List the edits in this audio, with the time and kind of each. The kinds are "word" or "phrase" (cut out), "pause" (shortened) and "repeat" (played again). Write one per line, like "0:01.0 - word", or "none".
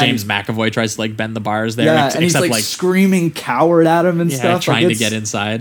none